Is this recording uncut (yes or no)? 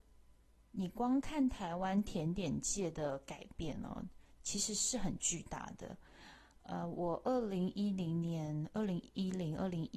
yes